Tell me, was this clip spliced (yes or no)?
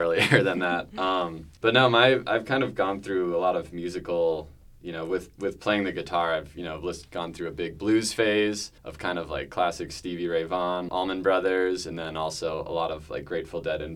yes